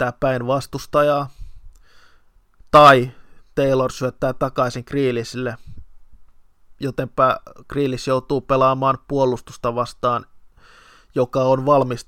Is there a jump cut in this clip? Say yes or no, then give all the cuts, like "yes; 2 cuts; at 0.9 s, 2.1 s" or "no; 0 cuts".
no; 0 cuts